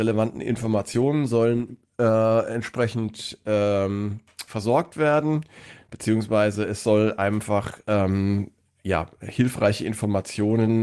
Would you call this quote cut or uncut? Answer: uncut